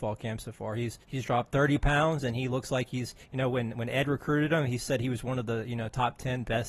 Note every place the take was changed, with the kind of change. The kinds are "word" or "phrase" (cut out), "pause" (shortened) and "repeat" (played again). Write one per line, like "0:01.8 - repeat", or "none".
0:01.0 - pause
0:03.2 - pause